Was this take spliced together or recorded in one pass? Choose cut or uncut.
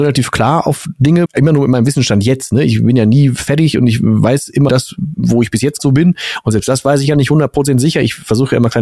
cut